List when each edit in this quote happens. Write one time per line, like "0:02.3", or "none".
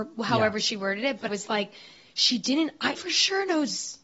0:01.3
0:03.0